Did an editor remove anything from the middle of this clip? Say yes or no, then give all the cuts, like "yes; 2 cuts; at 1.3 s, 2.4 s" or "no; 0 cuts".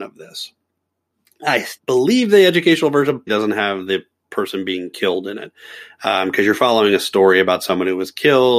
yes; 2 cuts; at 1.8 s, 3.3 s